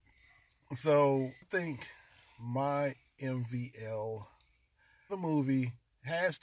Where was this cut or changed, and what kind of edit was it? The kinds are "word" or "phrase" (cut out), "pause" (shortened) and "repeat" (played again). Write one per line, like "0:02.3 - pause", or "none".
0:01.4 - word
0:05.1 - word